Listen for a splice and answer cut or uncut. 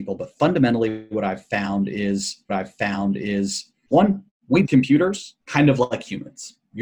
cut